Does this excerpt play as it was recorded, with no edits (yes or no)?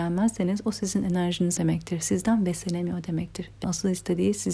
no